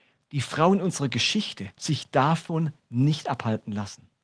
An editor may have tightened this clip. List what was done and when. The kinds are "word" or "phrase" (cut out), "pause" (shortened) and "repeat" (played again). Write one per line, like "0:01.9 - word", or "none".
0:01.8 - word